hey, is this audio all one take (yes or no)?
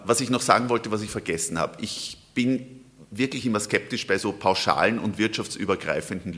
yes